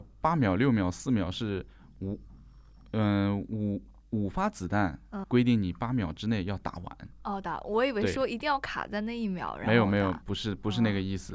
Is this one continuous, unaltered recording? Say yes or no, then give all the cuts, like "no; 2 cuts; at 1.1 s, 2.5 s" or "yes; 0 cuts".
no; 2 cuts; at 5.2 s, 10.2 s